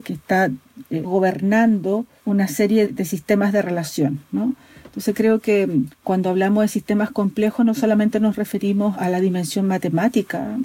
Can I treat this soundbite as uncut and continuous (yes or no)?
no